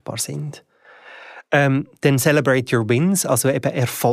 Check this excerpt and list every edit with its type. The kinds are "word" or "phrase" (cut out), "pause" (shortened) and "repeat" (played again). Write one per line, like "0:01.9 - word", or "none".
none